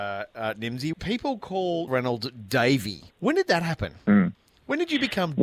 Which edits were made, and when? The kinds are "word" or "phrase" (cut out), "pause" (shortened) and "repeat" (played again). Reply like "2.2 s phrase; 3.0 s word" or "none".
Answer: 0.9 s phrase; 1.9 s word; 3.1 s pause